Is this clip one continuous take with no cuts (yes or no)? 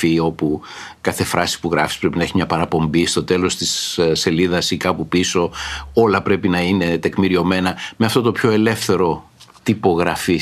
yes